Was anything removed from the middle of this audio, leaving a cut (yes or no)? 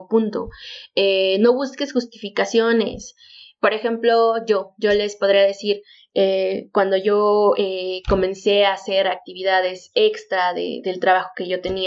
no